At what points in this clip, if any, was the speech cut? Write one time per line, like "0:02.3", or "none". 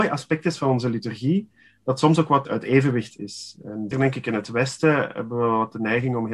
0:02.5
0:03.9